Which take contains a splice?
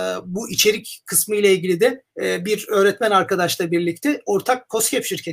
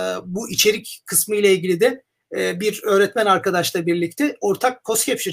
first; 1 cut; at 2.1 s

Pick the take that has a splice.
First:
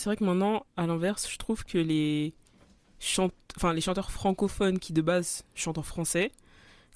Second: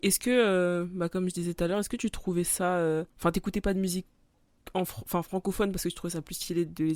second; 1 cut; at 3.1 s

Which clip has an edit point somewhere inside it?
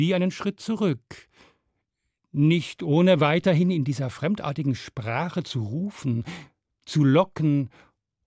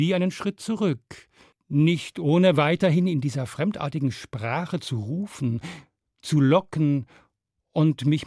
second; 1 cut; at 1.5 s

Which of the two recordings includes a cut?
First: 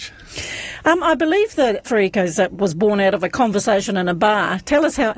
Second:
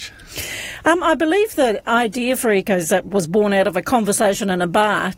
first; 1 cut; at 1.8 s

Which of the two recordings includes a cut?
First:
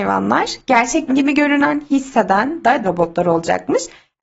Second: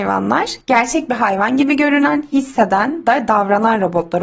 first; 2 cuts; at 1.1 s, 2.8 s

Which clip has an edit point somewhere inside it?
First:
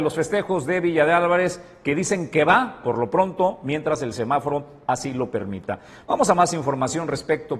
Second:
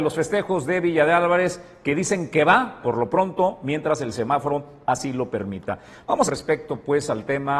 second; 1 cut; at 6.3 s

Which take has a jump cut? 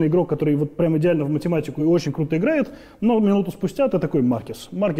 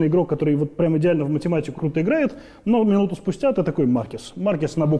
second; 1 cut; at 1.8 s

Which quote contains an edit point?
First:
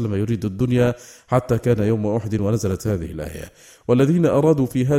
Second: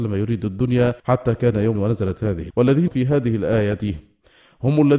second; 4 cuts; at 1.0 s, 1.7 s, 2.5 s, 2.9 s

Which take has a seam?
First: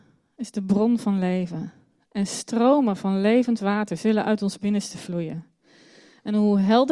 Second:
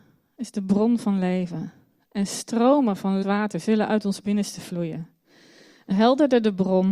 second; 2 cuts; at 3.2 s, 5.9 s

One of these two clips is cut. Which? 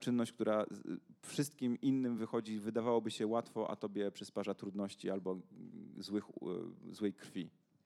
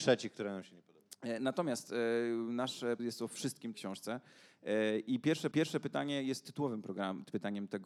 second; 3 cuts; at 3.0 s, 3.7 s, 5.5 s

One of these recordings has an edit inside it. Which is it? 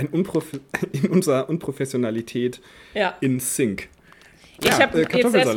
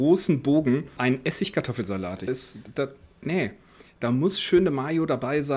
second; 2 cuts; at 1.0 s, 2.3 s

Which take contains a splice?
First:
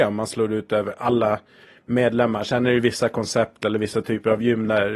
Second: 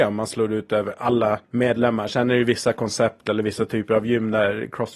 second; 1 cut; at 1.4 s

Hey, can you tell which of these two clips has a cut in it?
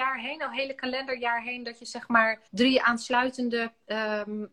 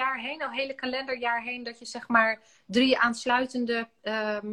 first; 1 cut; at 2.5 s

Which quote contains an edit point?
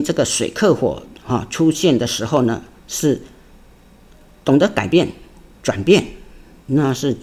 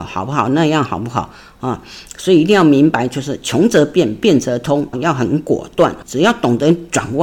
second; 2 cuts; at 4.9 s, 6.0 s

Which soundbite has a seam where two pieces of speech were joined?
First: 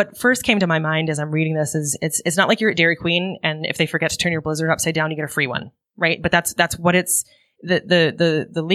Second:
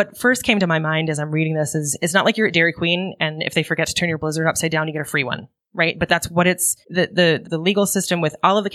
second; 4 cuts; at 2.0 s, 6.1 s, 6.8 s, 7.4 s

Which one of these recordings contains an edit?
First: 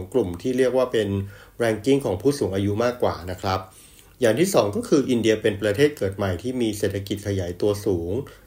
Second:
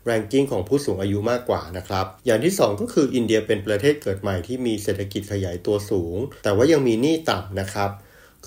second; 2 cuts; at 2.2 s, 6.4 s

